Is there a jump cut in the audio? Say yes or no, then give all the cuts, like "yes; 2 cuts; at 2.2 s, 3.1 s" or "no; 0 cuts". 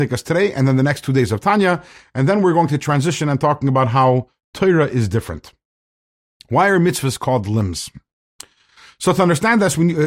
no; 0 cuts